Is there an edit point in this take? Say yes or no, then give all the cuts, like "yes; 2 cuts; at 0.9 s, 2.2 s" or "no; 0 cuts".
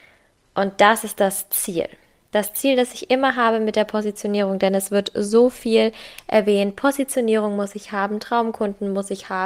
no; 0 cuts